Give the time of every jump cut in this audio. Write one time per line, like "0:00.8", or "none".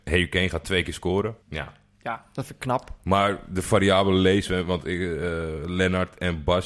0:01.4